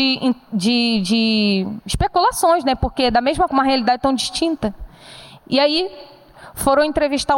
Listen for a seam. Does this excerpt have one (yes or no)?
yes